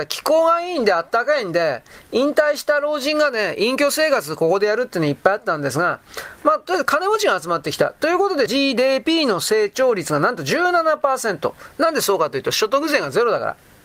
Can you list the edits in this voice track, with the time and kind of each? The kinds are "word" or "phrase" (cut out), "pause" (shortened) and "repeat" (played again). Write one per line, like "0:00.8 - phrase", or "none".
0:08.5 - phrase